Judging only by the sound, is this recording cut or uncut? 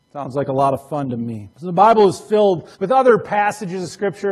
cut